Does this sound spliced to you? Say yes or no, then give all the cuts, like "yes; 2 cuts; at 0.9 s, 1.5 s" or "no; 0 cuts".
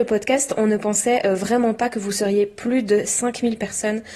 no; 0 cuts